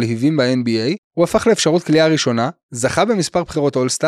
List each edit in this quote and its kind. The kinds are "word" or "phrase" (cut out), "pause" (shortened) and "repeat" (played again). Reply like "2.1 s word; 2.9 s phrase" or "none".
1.0 s pause